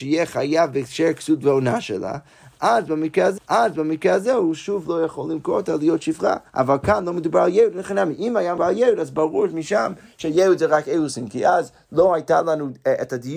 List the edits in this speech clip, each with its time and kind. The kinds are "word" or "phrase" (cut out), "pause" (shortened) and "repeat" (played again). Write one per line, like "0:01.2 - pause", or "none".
0:03.4 - repeat
0:06.5 - pause
0:08.6 - word

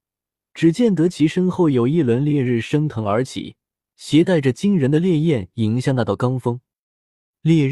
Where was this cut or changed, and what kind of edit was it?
0:03.7 - pause

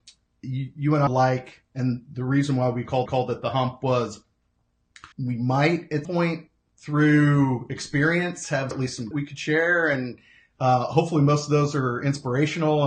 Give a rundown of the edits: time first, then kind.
0:01.1 - word
0:03.1 - repeat
0:05.1 - pause
0:06.0 - word
0:08.7 - phrase
0:09.1 - phrase

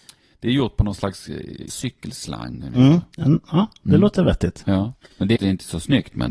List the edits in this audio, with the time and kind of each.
0:01.7 - word
0:03.1 - pause
0:05.0 - pause
0:05.4 - phrase

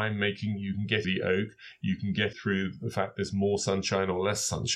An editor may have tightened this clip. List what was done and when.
0:01.0 - phrase
0:02.3 - word

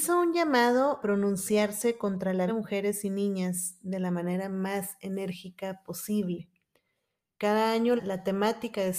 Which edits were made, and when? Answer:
0:01.0 - word
0:02.5 - word
0:08.0 - word

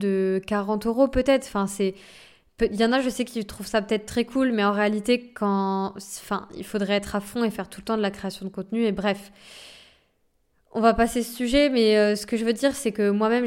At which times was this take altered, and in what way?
none

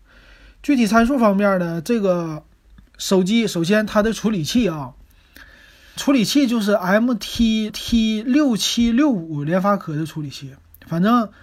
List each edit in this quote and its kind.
0:06.0 - word
0:07.7 - repeat

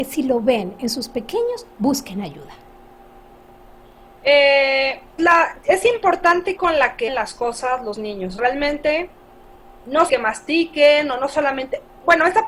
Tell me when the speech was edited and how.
0:01.7 - pause
0:05.2 - word
0:06.6 - phrase
0:07.1 - word
0:08.4 - word
0:10.1 - word

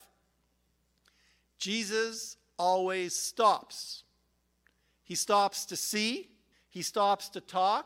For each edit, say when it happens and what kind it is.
0:06.5 - pause

